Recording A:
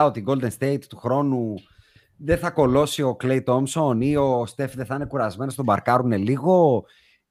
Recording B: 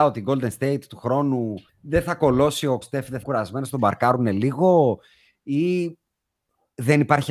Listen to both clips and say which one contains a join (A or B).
B